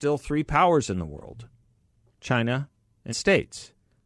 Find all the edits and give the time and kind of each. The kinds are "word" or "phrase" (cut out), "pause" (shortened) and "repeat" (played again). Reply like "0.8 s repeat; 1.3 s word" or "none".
2.1 s word; 3.1 s phrase